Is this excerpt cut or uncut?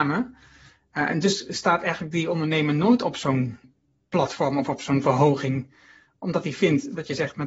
uncut